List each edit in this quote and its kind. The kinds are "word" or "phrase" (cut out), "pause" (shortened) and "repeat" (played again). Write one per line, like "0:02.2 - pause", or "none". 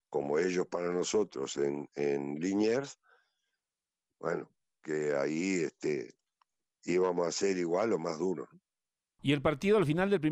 none